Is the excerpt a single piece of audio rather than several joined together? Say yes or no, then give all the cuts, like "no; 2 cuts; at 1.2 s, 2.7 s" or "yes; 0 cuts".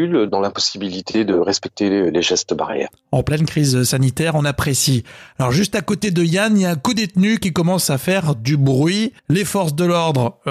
no; 1 cut; at 9.2 s